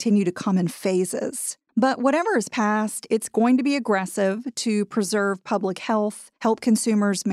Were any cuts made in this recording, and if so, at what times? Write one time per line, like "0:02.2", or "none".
0:01.7
0:06.4